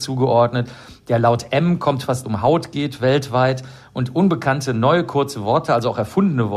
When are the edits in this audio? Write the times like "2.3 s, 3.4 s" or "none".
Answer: 2.2 s